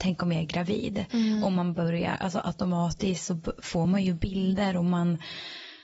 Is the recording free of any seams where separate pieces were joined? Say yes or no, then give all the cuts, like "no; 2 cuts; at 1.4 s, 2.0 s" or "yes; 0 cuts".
yes; 0 cuts